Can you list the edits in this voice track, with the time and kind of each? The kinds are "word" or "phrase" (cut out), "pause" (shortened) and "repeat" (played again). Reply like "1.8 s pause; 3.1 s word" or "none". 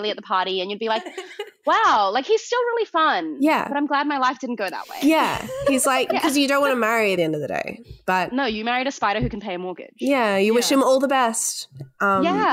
7.2 s phrase

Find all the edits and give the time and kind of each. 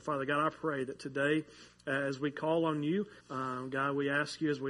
3.2 s pause

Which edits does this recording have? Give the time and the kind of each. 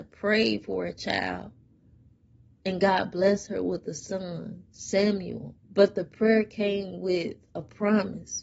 5.6 s pause

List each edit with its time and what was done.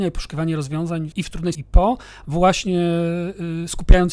1.1 s word; 1.5 s word

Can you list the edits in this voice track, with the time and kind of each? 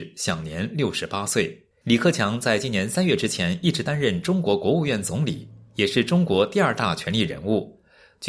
1.7 s pause

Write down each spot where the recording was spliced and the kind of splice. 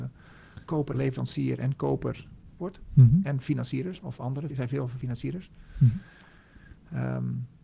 0.9 s phrase; 2.6 s word; 4.0 s word; 4.5 s word

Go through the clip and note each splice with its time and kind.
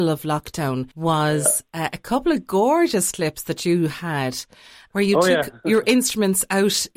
none

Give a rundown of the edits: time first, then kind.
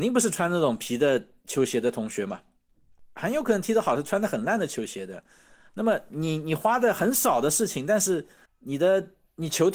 8.4 s pause

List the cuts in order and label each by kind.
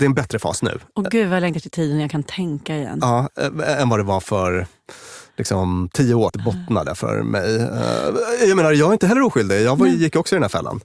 6.3 s phrase

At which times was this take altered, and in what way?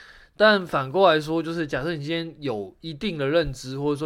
none

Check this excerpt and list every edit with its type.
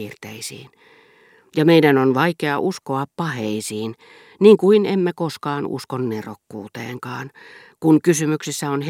none

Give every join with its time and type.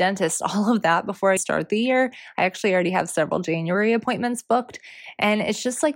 1.4 s word

